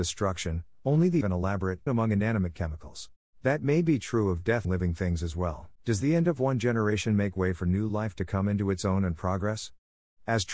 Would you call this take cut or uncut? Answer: cut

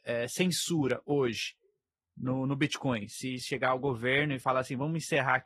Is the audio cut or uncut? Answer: uncut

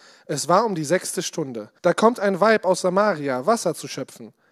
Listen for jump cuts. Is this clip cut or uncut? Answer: cut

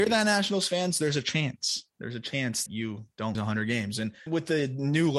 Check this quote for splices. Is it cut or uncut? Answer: cut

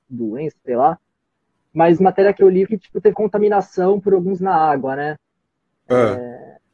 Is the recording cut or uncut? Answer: cut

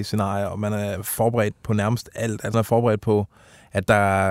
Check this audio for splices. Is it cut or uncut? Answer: cut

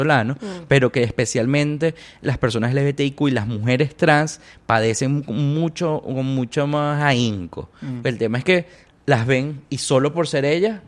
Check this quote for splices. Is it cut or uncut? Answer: uncut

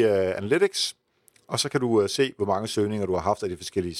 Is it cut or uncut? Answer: uncut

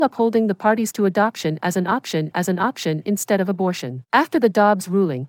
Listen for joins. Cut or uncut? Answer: cut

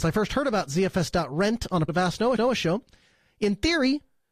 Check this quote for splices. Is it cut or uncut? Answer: cut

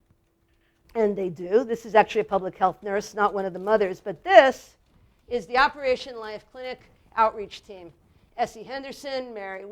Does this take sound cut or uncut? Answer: uncut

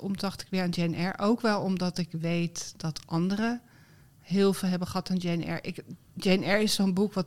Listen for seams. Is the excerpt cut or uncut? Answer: uncut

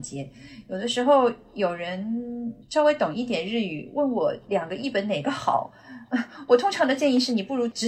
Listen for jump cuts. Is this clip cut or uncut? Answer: cut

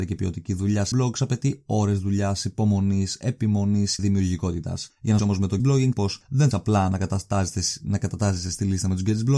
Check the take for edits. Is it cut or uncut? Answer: cut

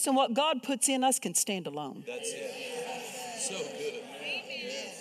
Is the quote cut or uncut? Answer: uncut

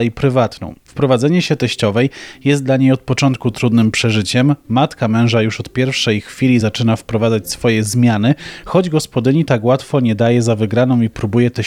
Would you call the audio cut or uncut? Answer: uncut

